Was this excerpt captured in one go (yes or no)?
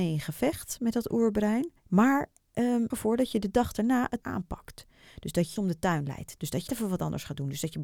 no